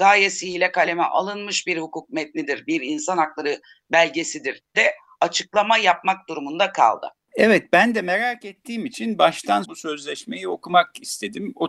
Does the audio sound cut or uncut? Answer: cut